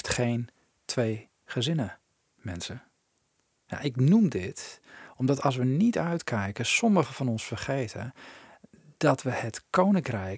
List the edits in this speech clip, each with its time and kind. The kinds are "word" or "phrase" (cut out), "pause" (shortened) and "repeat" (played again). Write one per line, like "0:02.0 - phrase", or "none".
none